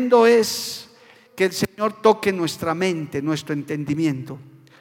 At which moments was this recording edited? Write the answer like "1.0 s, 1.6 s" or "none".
none